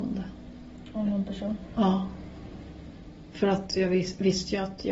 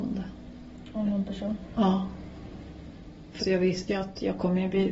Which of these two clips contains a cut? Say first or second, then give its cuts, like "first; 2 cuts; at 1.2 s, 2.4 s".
second; 2 cuts; at 3.4 s, 3.9 s